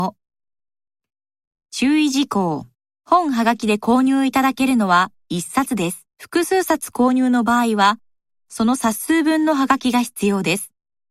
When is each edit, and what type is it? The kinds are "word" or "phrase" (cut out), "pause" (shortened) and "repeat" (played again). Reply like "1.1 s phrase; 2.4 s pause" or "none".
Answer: 2.7 s pause; 6.1 s pause